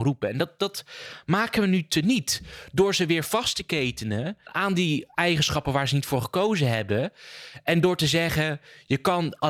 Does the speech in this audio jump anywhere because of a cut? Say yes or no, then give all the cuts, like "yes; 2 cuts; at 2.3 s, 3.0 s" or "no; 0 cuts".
no; 0 cuts